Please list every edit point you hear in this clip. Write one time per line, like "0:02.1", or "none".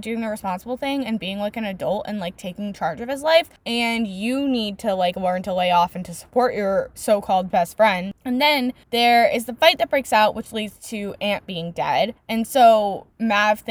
none